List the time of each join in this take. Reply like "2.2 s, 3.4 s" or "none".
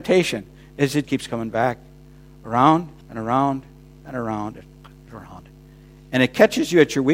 1.0 s, 3.0 s